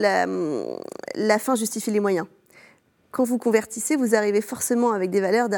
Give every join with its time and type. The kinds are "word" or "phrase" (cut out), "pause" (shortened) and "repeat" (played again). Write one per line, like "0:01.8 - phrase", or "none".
none